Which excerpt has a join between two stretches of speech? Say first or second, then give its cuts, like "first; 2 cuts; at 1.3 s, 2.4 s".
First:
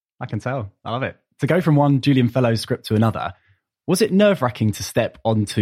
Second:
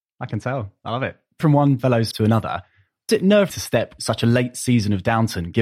second; 6 cuts; at 1.4 s, 1.8 s, 2.1 s, 3.1 s, 3.5 s, 4.0 s